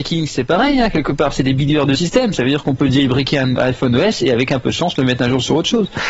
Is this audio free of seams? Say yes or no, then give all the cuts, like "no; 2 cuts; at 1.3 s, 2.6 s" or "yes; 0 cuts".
yes; 0 cuts